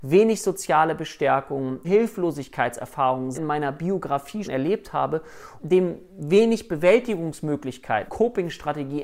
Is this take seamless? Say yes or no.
no